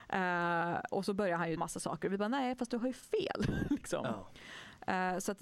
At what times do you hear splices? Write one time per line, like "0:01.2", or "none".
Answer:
0:00.9
0:01.6